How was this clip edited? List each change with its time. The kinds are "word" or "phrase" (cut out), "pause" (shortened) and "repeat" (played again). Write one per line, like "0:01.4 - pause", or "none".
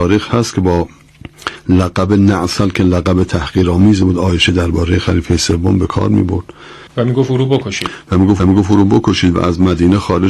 0:06.9 - pause
0:08.4 - repeat